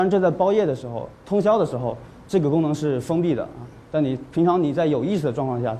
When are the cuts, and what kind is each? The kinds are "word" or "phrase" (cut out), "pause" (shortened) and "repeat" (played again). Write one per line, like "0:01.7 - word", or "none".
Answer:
none